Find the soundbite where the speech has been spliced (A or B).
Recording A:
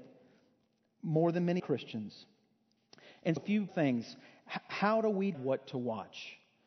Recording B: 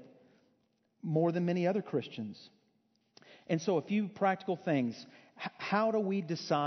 A